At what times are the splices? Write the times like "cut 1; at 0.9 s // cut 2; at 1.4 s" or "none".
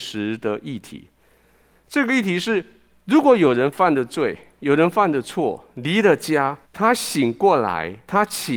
cut 1; at 6.6 s